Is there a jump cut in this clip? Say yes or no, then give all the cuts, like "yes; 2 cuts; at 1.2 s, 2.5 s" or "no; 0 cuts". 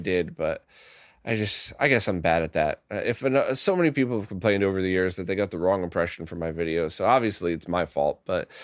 no; 0 cuts